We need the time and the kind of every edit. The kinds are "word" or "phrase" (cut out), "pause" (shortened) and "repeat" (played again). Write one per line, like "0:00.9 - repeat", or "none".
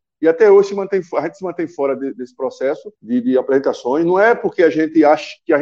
0:03.0 - pause